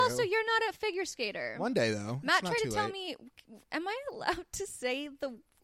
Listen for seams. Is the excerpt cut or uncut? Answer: uncut